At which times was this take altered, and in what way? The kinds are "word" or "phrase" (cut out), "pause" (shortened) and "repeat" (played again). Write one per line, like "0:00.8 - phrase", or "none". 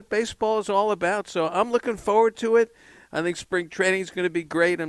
none